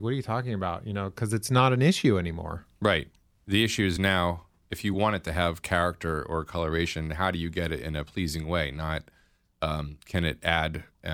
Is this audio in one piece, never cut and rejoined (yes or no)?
yes